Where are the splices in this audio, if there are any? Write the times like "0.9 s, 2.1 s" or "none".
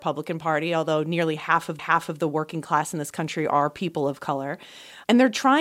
1.8 s